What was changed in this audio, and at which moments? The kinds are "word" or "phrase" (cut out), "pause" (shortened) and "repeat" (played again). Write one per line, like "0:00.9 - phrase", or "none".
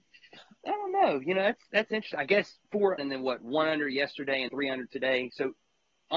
0:03.0 - phrase
0:04.5 - word

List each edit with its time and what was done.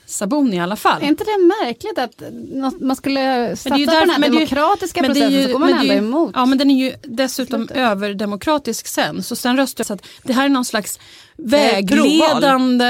0:09.8 - phrase

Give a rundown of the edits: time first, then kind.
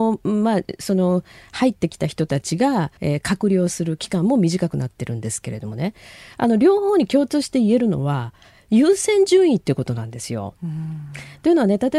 0:03.0 - pause

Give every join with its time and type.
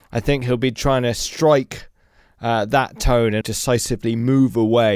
0:03.4 - word

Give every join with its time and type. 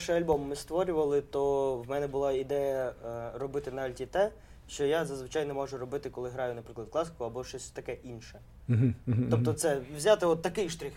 none

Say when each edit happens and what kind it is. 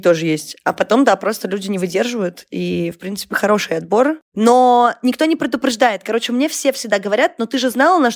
none

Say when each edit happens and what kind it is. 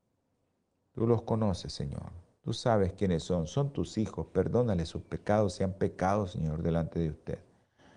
none

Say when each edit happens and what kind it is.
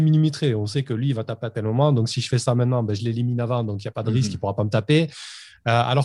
none

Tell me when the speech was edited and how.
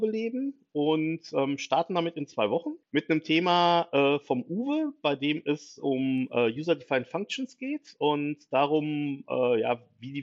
0:02.8 - pause

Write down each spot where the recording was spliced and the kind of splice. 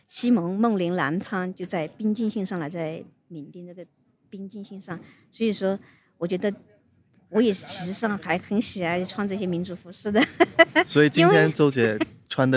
none

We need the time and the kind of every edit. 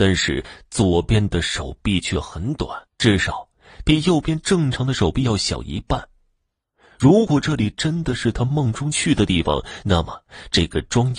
0:02.9 - pause

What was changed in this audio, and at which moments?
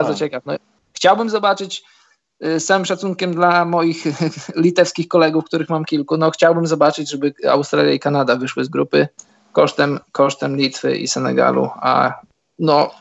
none

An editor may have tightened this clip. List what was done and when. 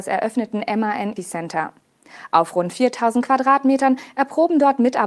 0:01.2 - word

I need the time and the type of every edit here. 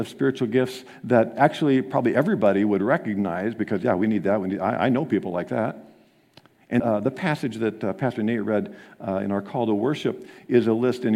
0:06.8 - word

